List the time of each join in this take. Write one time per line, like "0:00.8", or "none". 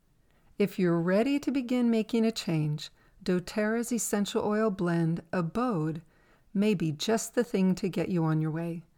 none